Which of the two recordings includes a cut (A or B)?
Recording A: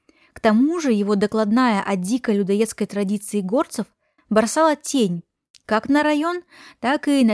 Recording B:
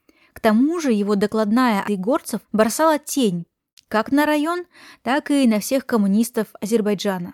B